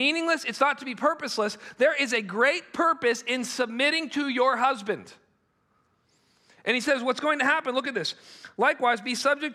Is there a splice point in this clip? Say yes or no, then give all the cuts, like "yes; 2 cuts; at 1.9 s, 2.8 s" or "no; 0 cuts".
no; 0 cuts